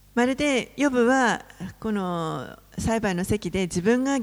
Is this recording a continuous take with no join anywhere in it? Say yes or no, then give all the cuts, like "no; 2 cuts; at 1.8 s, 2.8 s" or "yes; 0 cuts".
yes; 0 cuts